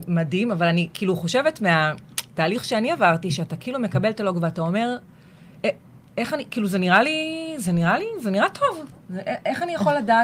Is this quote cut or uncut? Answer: uncut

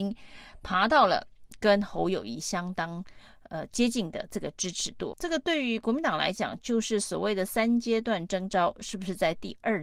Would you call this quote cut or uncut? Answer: cut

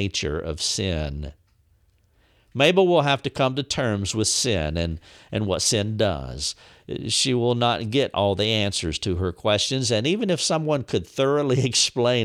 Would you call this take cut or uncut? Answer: uncut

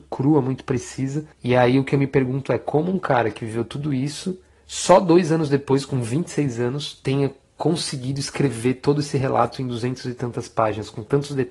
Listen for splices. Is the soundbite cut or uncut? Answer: uncut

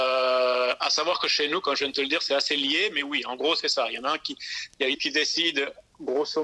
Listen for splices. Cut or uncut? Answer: cut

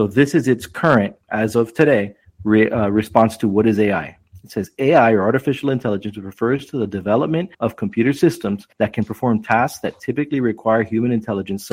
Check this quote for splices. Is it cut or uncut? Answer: cut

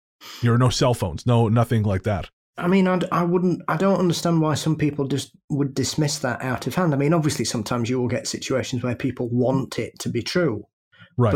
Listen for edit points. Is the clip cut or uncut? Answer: uncut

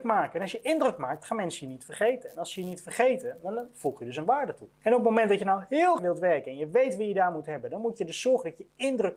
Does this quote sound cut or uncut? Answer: cut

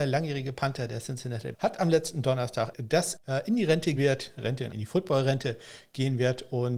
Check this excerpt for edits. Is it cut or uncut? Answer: cut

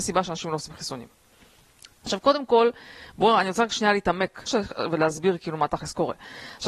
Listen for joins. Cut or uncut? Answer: cut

